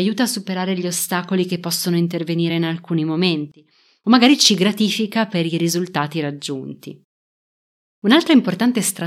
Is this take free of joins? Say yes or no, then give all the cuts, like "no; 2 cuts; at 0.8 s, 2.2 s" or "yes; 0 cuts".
yes; 0 cuts